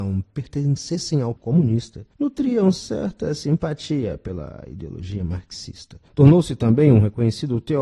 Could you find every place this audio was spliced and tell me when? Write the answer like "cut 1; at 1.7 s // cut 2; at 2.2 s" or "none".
cut 1; at 1.4 s // cut 2; at 2.1 s // cut 3; at 6.1 s